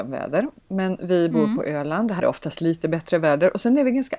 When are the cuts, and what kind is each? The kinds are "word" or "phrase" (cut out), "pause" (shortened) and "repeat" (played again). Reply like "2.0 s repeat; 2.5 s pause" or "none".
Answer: 2.2 s word